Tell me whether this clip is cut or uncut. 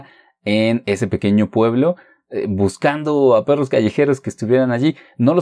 uncut